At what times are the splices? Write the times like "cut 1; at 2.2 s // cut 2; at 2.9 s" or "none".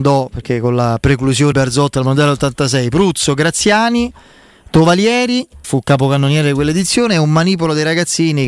cut 1; at 1.5 s // cut 2; at 5.6 s